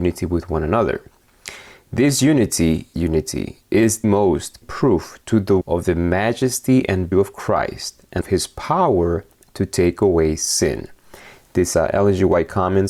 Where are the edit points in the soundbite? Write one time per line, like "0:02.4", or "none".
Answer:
0:02.9
0:04.0
0:04.6
0:05.6
0:07.1
0:08.2
0:11.7